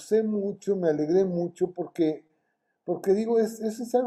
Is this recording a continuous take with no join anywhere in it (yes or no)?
yes